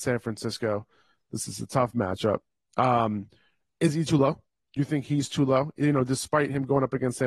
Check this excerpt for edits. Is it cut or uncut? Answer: uncut